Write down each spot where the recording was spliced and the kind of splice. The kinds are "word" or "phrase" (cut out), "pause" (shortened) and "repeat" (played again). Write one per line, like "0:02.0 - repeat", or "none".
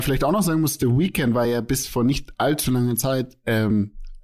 none